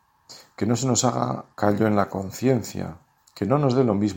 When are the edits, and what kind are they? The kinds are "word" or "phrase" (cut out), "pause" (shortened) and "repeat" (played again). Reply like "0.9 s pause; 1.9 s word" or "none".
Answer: 1.5 s pause; 3.2 s pause